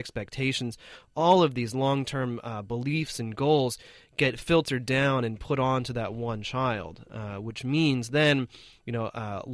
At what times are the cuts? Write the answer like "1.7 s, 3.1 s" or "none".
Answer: none

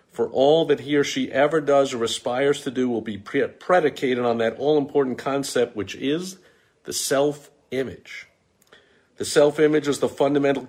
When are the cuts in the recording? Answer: none

